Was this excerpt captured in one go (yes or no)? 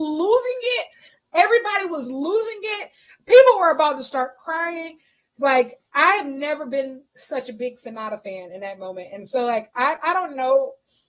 yes